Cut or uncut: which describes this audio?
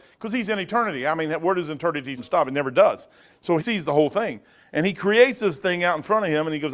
cut